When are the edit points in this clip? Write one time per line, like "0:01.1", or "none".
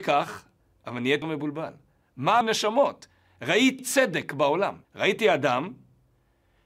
0:01.2
0:02.4
0:03.8
0:04.8